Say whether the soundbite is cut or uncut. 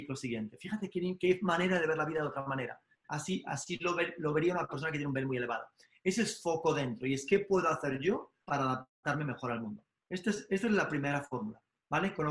uncut